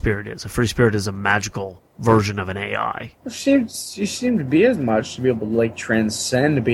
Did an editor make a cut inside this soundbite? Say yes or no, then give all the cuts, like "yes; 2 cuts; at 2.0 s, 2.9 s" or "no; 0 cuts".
yes; 2 cuts; at 1.9 s, 3.2 s